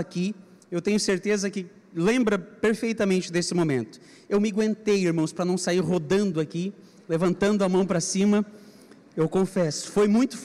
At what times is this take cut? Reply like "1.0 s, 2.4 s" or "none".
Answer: none